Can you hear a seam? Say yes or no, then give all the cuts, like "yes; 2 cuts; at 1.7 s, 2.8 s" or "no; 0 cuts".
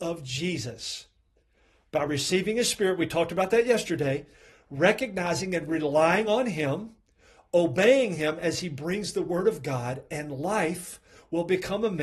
no; 0 cuts